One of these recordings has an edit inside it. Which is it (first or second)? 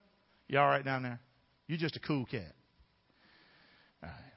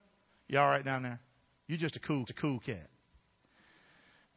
second